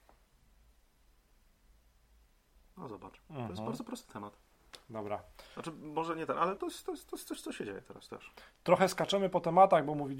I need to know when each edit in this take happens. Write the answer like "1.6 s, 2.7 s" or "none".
6.6 s